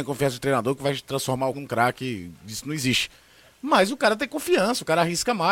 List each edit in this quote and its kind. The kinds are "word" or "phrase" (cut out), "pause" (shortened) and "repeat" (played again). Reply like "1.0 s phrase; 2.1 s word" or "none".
1.5 s word